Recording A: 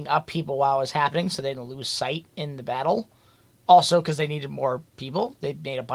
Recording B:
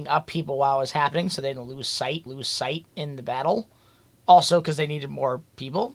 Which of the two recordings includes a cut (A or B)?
B